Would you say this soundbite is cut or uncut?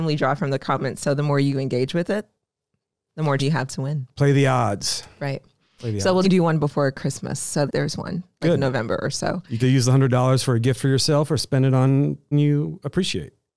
cut